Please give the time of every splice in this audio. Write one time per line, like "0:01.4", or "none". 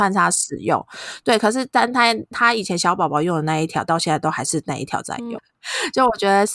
0:05.4